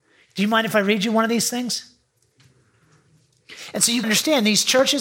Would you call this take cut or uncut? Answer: cut